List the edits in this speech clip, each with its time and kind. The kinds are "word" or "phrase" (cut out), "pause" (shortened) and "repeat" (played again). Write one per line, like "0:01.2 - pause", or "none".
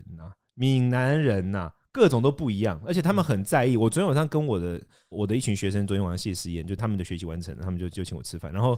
none